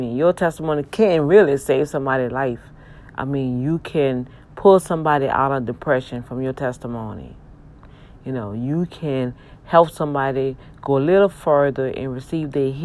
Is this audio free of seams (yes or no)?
yes